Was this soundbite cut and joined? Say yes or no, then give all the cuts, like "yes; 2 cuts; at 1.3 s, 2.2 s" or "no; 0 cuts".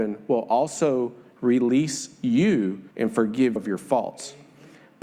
yes; 2 cuts; at 2.9 s, 3.6 s